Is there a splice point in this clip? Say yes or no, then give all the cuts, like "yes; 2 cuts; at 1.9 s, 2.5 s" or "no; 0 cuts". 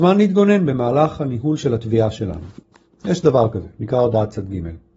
no; 0 cuts